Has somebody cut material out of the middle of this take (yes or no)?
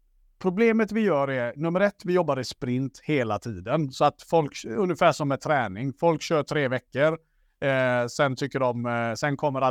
no